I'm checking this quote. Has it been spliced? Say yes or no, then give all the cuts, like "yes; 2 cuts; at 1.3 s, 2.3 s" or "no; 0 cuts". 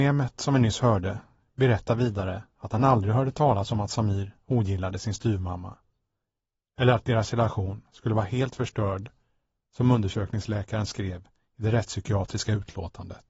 no; 0 cuts